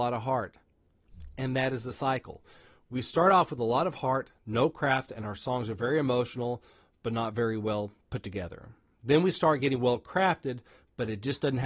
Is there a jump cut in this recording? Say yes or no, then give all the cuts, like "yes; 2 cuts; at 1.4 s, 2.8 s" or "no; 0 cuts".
no; 0 cuts